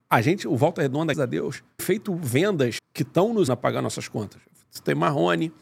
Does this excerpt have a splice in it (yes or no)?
yes